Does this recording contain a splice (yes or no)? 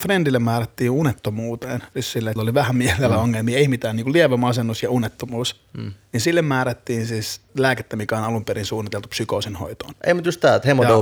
yes